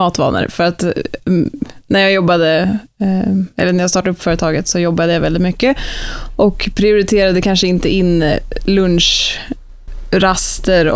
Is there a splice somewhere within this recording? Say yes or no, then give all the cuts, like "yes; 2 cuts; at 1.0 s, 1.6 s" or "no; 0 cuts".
no; 0 cuts